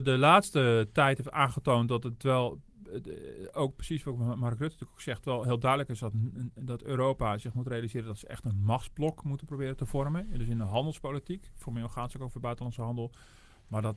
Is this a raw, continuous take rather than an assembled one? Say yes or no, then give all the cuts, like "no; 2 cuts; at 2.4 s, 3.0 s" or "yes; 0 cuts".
yes; 0 cuts